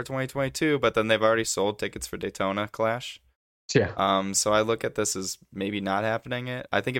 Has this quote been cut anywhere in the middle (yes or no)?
no